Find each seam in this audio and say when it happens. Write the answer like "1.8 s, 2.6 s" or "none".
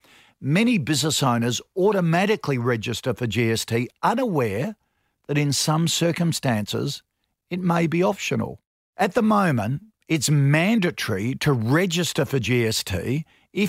none